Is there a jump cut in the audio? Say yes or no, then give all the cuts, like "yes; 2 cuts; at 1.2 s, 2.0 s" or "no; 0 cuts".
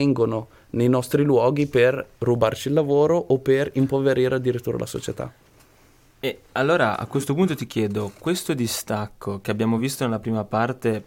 no; 0 cuts